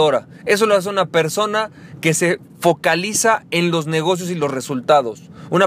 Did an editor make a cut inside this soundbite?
no; 0 cuts

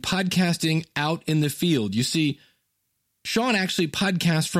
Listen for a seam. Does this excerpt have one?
no; 0 cuts

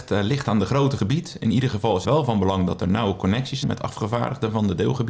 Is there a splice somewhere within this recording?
yes; 3 cuts; at 1.0 s, 2.0 s, 3.6 s

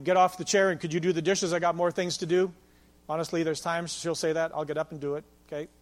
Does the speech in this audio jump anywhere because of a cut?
no; 0 cuts

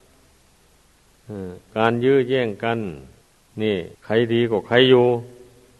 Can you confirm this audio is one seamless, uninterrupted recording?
no; 2 cuts; at 3.2 s, 3.9 s

